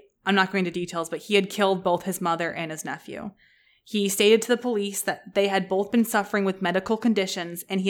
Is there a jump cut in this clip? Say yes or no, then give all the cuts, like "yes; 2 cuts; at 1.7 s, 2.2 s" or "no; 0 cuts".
no; 0 cuts